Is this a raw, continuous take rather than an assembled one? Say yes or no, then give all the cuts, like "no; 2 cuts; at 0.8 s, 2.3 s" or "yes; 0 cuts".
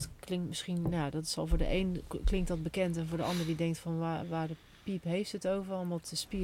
yes; 0 cuts